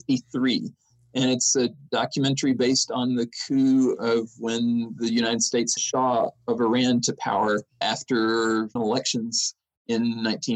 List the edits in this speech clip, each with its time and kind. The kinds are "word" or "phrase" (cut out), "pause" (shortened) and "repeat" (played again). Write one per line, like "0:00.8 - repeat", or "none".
0:05.8 - phrase
0:07.8 - word
0:08.8 - word